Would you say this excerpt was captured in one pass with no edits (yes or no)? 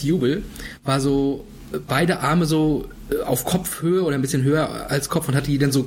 yes